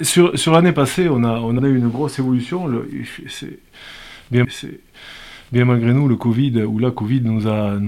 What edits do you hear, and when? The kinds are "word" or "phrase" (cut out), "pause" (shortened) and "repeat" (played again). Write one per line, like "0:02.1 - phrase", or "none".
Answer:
0:01.6 - phrase
0:04.4 - repeat

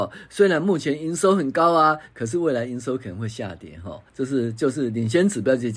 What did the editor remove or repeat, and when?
0:04.1 - pause

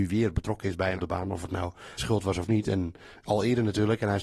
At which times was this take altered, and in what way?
0:01.0 - word
0:02.0 - word

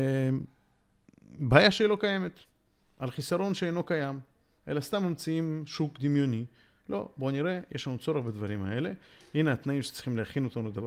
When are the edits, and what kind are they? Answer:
none

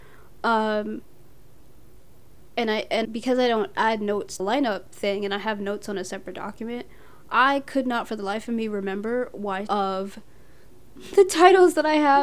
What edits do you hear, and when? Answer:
0:03.0 - word
0:04.4 - phrase
0:09.7 - word

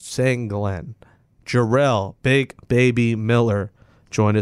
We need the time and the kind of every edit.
none

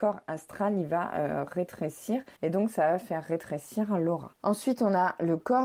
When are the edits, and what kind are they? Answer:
0:02.4 - pause
0:04.3 - pause

